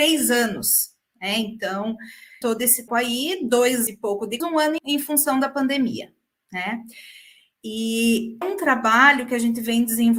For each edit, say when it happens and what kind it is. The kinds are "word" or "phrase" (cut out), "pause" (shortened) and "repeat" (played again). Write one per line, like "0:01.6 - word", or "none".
0:02.4 - word
0:02.9 - word
0:03.9 - word
0:04.4 - word
0:04.8 - word
0:08.4 - word

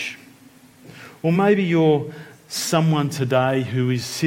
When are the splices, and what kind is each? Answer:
none

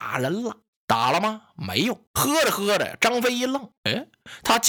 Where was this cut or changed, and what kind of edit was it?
0:02.1 - pause
0:03.8 - pause

